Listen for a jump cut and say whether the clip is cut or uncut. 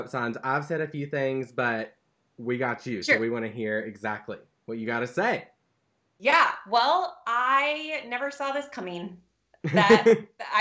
uncut